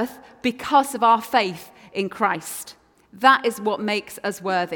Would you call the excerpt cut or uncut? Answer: uncut